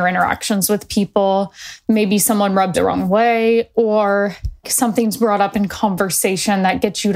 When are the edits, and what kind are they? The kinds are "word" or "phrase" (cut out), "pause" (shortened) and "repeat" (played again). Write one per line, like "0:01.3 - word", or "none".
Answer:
0:02.7 - word
0:04.6 - word